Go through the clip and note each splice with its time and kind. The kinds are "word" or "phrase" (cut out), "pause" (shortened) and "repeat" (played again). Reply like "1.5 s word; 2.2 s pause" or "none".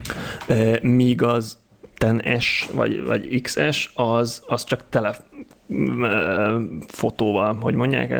none